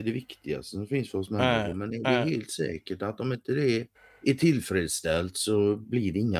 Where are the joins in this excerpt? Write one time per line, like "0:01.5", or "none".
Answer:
0:04.0